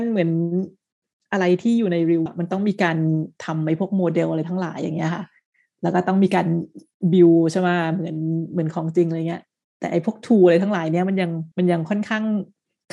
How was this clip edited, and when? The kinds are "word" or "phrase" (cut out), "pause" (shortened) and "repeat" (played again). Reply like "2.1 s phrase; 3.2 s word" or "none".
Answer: 2.3 s word; 11.5 s pause